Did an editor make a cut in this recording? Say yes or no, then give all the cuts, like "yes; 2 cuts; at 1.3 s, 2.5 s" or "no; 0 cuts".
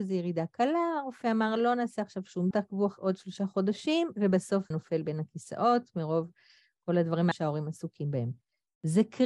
yes; 3 cuts; at 2.5 s, 4.7 s, 7.3 s